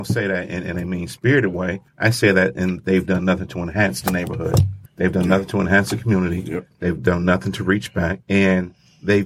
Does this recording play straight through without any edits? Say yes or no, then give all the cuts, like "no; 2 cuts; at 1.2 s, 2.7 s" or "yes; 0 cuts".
no; 3 cuts; at 1.9 s, 4.9 s, 8.2 s